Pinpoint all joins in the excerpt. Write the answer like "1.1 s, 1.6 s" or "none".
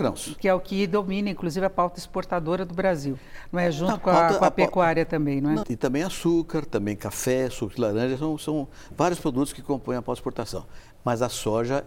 5.6 s